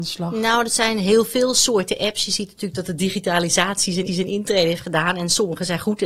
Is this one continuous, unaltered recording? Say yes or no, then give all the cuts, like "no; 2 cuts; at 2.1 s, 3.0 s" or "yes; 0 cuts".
no; 1 cut; at 4.1 s